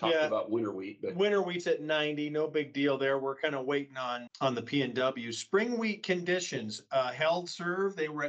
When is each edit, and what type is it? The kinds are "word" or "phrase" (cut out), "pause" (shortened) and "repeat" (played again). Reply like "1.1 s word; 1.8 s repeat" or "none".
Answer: 4.3 s word